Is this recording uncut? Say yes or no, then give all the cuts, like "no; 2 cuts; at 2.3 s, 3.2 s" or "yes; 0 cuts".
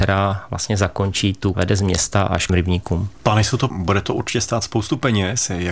no; 3 cuts; at 1.5 s, 2.5 s, 3.7 s